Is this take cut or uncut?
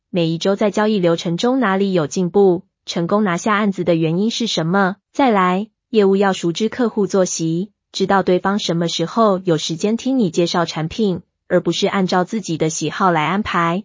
cut